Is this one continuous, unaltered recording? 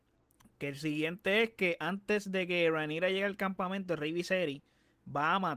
yes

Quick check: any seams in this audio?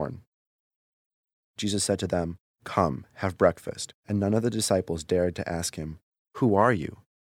yes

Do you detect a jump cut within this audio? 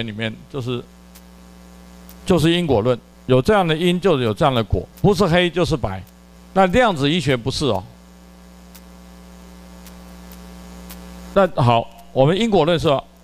yes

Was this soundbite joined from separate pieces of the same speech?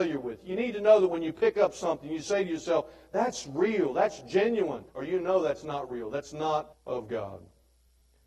yes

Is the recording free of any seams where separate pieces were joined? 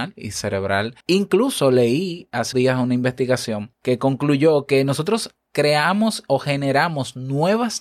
no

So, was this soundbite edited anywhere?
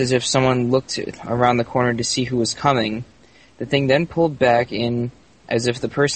no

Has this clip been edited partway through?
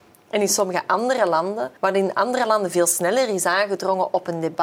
yes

